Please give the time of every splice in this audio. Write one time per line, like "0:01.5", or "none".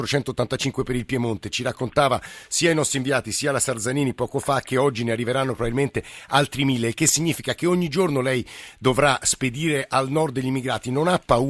none

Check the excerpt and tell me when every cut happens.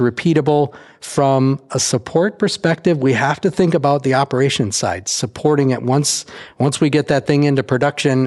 none

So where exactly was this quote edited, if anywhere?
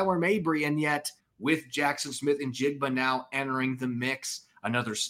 0:01.2

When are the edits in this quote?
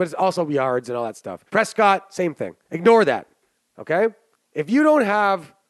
0:01.5
0:02.6
0:04.3

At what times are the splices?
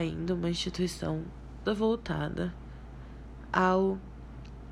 0:01.7

